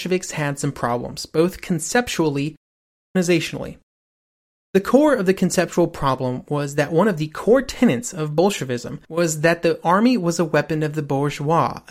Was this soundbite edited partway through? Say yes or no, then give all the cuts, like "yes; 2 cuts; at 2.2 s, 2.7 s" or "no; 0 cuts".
yes; 1 cut; at 9.0 s